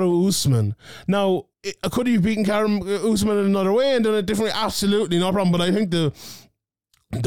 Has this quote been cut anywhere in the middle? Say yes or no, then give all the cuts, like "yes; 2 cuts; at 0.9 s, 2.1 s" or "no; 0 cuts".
yes; 1 cut; at 1.5 s